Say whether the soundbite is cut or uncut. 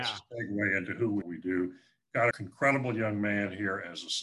cut